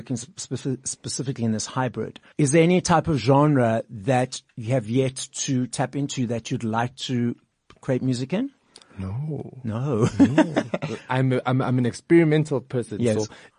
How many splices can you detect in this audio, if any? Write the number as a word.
zero